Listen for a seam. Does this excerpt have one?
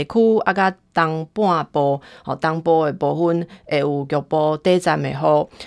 no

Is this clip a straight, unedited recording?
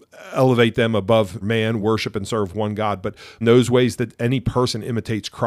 no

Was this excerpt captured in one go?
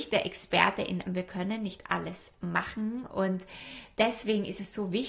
no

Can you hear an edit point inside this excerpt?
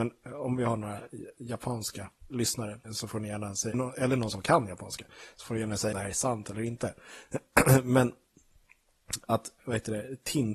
yes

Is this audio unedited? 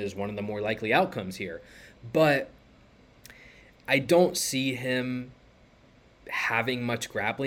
yes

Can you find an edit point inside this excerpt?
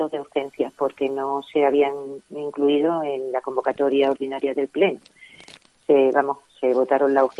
no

